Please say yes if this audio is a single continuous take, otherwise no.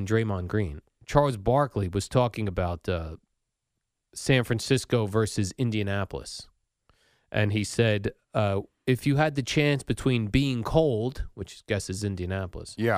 yes